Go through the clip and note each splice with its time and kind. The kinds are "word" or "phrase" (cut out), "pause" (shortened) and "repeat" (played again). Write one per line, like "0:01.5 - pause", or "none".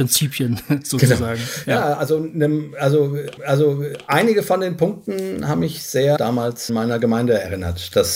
0:03.4 - repeat
0:06.2 - phrase
0:06.7 - word